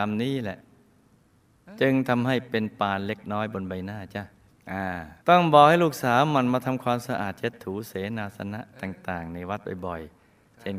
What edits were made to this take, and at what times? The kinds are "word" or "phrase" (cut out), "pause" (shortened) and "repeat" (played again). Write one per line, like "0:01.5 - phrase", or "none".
0:04.5 - pause
0:05.2 - pause
0:08.7 - pause